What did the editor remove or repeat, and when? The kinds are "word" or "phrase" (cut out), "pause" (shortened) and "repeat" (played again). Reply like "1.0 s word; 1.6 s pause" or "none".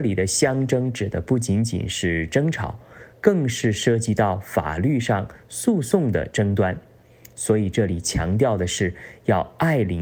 none